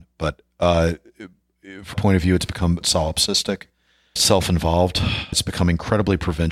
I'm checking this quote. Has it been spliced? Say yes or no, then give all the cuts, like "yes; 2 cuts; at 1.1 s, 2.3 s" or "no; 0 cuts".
yes; 4 cuts; at 1.9 s, 2.8 s, 4.2 s, 5.3 s